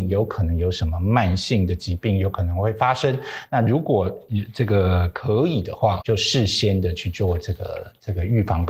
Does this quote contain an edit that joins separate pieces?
yes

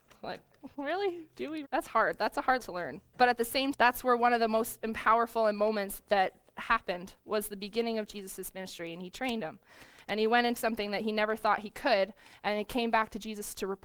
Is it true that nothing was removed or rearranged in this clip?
no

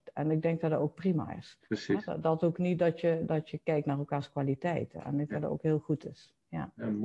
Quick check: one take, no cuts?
no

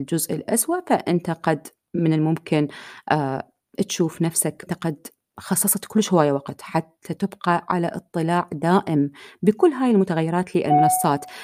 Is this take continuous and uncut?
no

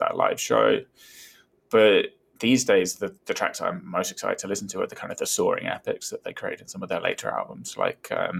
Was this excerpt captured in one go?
yes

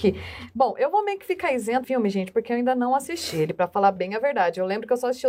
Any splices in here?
yes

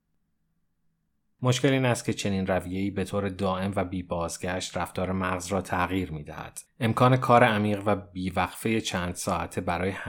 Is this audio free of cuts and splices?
yes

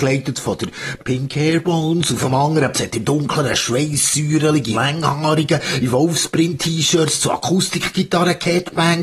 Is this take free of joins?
no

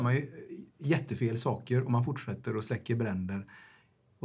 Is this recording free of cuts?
yes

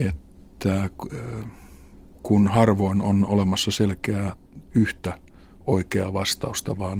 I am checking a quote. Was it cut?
no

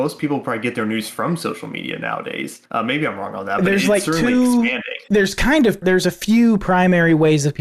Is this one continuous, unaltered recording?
no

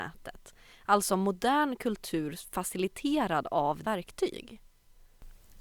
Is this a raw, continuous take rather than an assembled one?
no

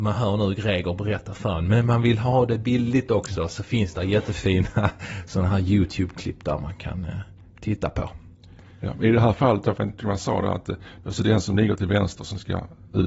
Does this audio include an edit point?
no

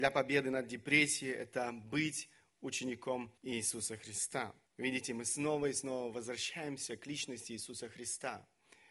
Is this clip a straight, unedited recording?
no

